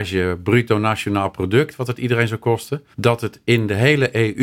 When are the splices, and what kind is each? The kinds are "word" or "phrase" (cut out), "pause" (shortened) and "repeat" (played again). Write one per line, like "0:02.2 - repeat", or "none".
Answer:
0:02.9 - pause